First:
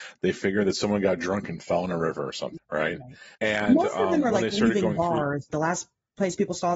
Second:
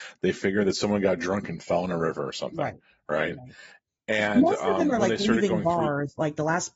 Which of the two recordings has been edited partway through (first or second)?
first